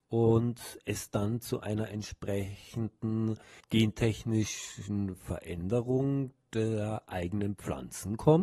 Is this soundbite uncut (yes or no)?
yes